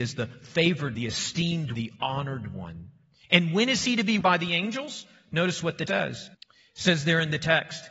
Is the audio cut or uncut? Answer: cut